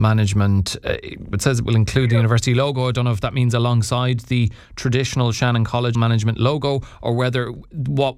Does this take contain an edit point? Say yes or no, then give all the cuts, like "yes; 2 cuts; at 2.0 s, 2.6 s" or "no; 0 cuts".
yes; 2 cuts; at 1.3 s, 5.9 s